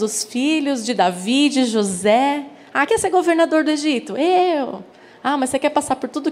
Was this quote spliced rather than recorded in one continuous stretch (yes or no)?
yes